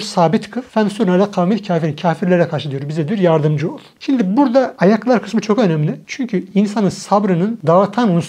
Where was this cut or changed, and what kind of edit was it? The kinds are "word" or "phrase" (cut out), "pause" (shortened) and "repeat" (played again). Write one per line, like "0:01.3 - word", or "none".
none